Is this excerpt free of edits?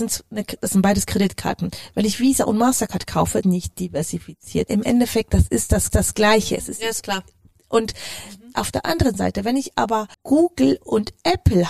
no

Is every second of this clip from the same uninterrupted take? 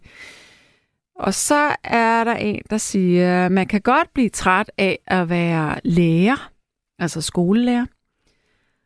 yes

